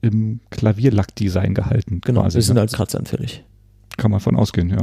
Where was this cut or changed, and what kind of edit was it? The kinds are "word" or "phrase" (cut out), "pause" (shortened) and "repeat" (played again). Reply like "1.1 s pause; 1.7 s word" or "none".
2.7 s word